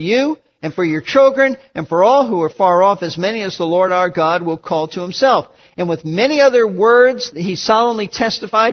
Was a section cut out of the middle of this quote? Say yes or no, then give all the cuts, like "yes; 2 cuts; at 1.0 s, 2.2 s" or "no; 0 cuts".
no; 0 cuts